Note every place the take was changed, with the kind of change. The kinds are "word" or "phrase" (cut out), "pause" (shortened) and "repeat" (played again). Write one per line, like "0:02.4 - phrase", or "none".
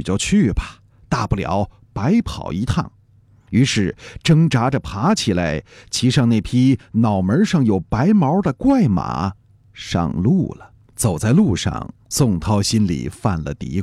0:10.8 - pause
0:12.0 - pause